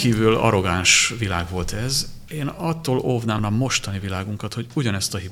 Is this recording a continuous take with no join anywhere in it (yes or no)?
no